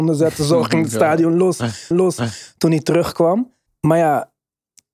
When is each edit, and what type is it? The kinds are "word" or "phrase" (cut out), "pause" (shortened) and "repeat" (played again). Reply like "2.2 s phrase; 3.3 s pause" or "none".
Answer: 1.9 s repeat; 3.7 s pause